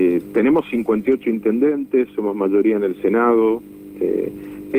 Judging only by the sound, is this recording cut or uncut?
uncut